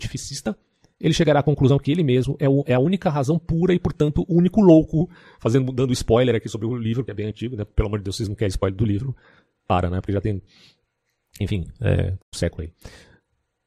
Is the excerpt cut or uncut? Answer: uncut